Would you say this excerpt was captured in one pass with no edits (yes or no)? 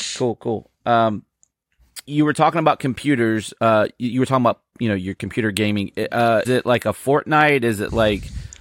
no